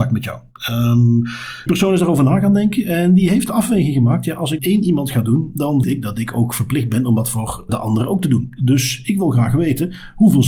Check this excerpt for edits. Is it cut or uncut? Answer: cut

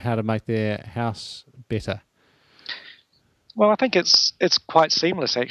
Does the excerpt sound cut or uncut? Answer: uncut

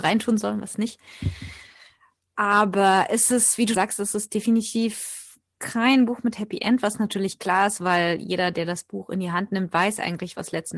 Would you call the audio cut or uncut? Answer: cut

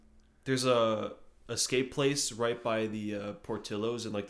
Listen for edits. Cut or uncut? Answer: uncut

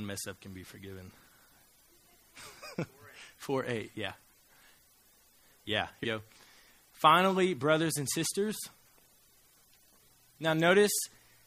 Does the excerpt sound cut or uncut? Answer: cut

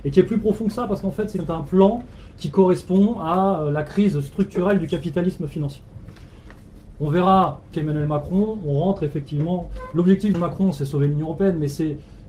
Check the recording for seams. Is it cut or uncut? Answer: cut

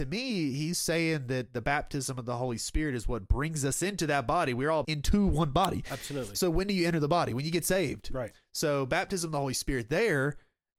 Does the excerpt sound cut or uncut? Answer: cut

